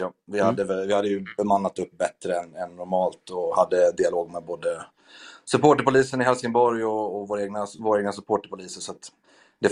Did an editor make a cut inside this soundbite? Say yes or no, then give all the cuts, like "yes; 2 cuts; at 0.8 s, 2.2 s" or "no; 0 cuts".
no; 0 cuts